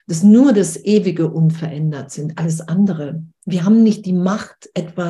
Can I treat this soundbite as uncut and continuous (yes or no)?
yes